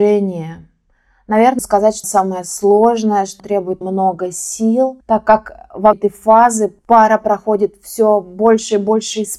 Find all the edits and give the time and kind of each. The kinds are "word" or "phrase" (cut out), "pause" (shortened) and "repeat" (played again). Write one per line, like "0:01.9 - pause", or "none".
0:01.6 - word
0:02.0 - word
0:03.4 - word
0:03.8 - word
0:05.0 - word
0:05.9 - word

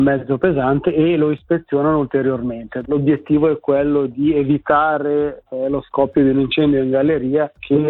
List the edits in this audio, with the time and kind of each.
none

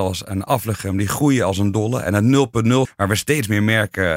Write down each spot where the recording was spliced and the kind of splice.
0:02.8 - word

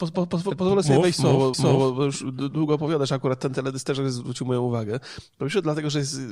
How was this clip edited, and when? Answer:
0:01.5 - repeat

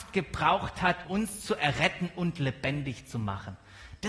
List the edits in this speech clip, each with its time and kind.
0:01.0 - word

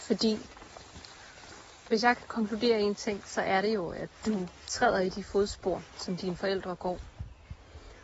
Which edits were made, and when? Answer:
0:04.6 - pause

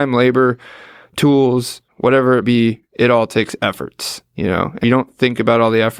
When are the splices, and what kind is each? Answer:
0:01.9 - word
0:02.4 - word
0:04.8 - phrase

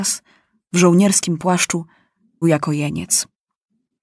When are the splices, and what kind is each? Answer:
0:02.4 - word

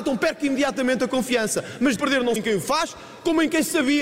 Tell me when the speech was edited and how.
0:02.0 - word
0:02.4 - word

